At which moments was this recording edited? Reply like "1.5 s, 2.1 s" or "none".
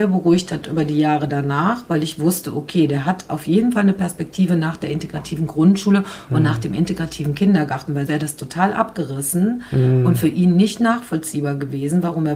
8.1 s